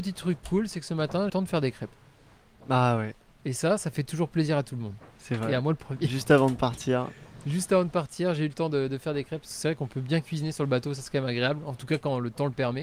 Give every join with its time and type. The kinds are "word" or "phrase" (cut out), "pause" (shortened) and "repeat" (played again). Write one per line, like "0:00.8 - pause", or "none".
0:01.3 - phrase